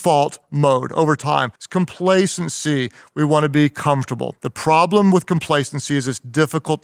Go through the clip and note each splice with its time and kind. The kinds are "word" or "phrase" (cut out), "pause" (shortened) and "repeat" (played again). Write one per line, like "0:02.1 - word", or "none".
0:01.6 - pause
0:04.4 - pause